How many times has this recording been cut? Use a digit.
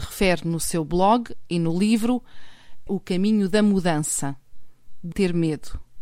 2